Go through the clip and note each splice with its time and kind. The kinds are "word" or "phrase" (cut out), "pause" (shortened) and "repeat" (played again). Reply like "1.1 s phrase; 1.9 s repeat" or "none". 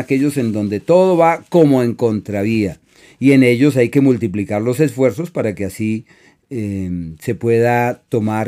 none